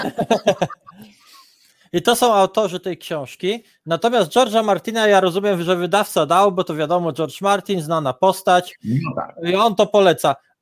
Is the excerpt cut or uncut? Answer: uncut